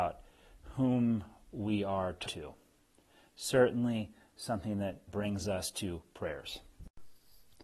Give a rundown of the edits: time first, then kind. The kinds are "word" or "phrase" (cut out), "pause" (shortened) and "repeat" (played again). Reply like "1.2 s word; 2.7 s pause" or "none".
2.2 s word; 5.1 s word